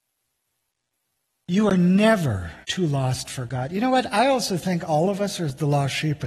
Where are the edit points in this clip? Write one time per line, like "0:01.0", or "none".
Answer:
0:02.6